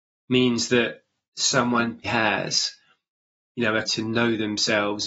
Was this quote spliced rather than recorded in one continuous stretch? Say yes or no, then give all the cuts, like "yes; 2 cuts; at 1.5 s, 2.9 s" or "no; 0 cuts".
yes; 2 cuts; at 2.0 s, 3.8 s